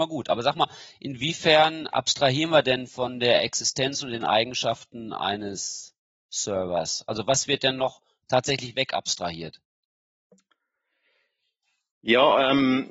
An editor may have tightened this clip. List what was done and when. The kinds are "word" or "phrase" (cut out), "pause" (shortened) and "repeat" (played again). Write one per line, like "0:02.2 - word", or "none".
none